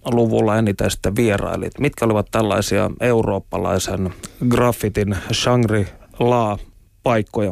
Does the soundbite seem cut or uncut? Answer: uncut